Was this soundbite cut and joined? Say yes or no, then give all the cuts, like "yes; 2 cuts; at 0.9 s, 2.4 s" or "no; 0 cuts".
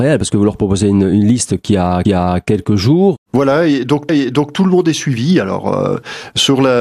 yes; 2 cuts; at 2.0 s, 4.1 s